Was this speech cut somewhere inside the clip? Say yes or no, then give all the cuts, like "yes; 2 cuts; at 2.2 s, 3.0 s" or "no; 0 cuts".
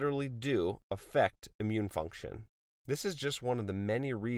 yes; 1 cut; at 2.6 s